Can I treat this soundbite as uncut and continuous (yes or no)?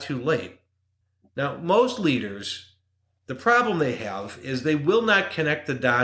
yes